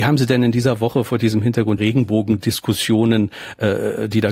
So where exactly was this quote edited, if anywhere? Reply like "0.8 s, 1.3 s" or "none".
1.8 s

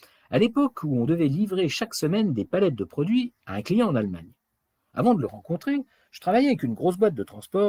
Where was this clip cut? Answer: none

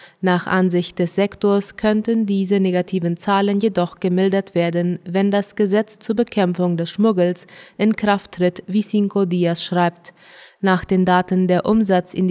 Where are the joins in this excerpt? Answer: none

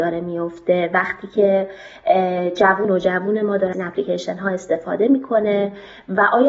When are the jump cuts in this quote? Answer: 2.8 s, 3.7 s

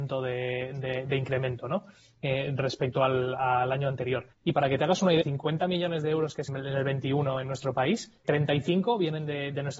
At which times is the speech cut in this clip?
4.3 s, 5.2 s, 6.5 s, 8.3 s

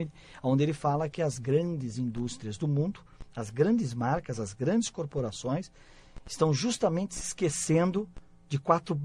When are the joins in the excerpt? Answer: none

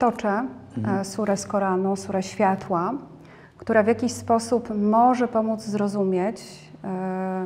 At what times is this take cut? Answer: none

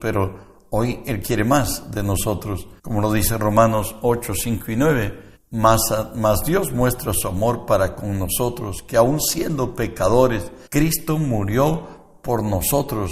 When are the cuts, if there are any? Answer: 2.8 s, 5.4 s, 10.7 s

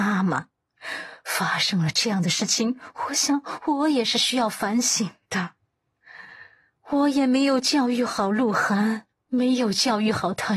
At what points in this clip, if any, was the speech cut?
none

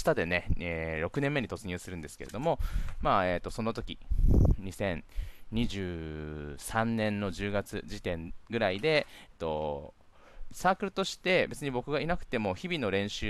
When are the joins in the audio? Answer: 9.3 s

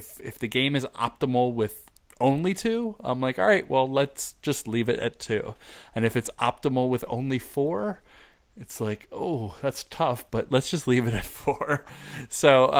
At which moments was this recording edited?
none

